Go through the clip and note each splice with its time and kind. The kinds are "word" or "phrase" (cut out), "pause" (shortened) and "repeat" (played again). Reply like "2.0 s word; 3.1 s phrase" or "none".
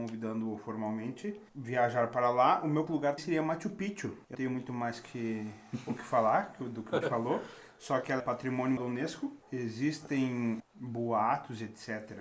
1.5 s word; 2.9 s word; 3.2 s word; 4.3 s word; 7.0 s word; 8.2 s word; 8.8 s word; 10.6 s word